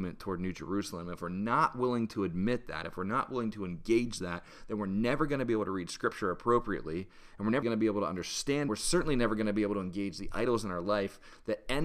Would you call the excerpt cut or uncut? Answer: cut